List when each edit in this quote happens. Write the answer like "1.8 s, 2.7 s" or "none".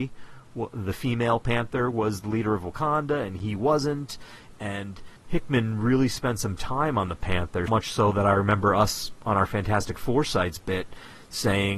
5.2 s, 7.7 s